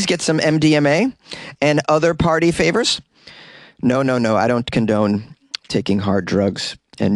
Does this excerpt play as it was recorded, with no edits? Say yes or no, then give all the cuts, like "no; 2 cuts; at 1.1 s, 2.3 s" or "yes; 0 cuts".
yes; 0 cuts